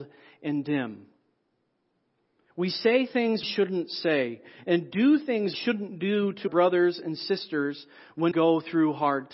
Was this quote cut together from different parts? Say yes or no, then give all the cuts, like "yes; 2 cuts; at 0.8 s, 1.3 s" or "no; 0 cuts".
yes; 4 cuts; at 3.4 s, 5.5 s, 6.5 s, 8.3 s